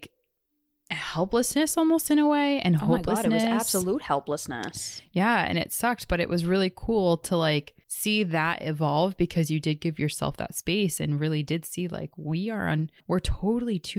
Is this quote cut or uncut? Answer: cut